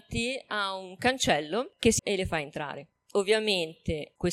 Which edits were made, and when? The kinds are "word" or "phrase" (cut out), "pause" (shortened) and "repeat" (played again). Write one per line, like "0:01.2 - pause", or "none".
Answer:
0:02.0 - word